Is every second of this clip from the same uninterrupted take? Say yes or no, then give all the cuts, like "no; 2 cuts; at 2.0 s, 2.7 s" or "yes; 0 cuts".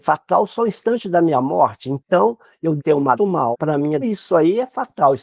no; 4 cuts; at 2.8 s, 3.1 s, 3.5 s, 4.0 s